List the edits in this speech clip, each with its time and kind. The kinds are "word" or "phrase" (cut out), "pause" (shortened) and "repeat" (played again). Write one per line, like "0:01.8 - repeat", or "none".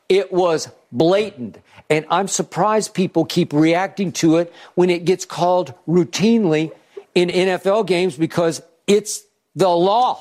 none